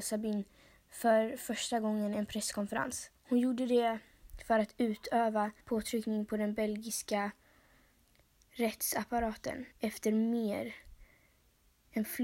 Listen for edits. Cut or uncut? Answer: cut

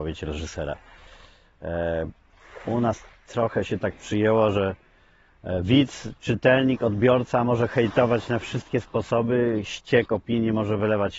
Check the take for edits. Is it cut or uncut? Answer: uncut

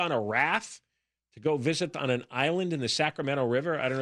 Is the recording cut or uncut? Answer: cut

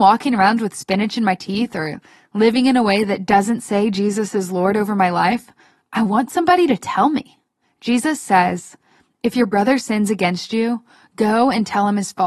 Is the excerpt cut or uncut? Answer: uncut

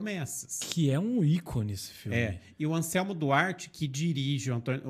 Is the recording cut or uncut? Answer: uncut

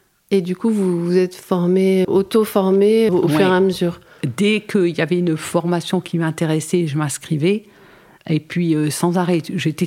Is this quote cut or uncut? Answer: cut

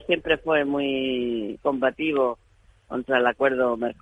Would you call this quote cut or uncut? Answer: cut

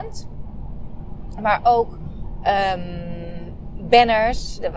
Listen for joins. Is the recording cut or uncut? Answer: uncut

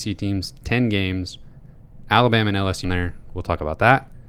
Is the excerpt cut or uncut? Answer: cut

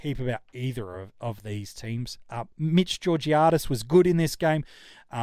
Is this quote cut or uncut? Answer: uncut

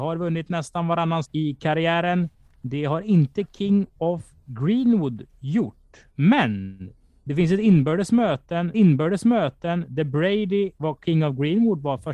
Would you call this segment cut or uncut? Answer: cut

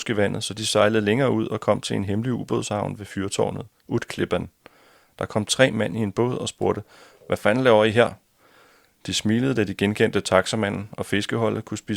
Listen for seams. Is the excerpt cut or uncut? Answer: uncut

